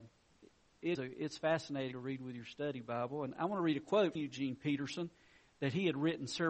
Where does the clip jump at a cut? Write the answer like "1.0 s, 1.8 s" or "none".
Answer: 1.0 s, 1.9 s, 4.2 s